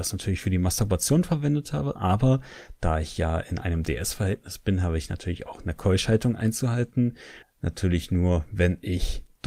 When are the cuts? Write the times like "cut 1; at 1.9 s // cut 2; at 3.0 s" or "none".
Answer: cut 1; at 7.4 s